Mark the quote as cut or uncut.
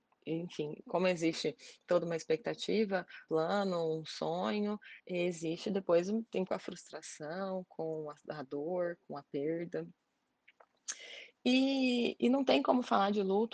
cut